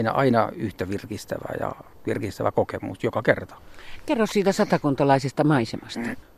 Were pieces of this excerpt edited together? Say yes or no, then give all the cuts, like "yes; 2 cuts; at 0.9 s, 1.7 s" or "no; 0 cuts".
no; 0 cuts